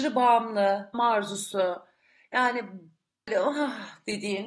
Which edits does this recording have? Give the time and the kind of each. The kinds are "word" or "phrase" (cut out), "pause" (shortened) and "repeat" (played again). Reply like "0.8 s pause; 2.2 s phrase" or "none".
0.9 s word